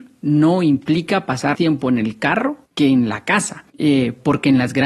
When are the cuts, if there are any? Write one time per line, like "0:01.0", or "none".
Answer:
0:01.5
0:02.7
0:03.7